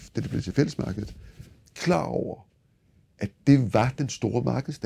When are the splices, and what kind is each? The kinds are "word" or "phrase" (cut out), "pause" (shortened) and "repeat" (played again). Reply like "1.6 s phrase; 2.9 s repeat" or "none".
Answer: none